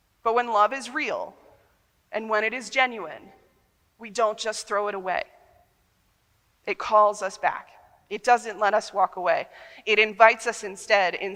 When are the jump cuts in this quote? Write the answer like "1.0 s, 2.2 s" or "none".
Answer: none